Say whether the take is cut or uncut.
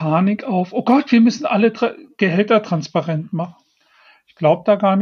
uncut